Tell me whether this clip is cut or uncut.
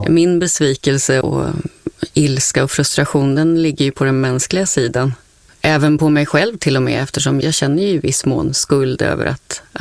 cut